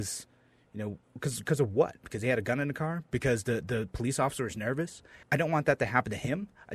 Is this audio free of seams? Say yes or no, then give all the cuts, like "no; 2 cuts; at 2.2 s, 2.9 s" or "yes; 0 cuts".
no; 2 cuts; at 1.0 s, 5.2 s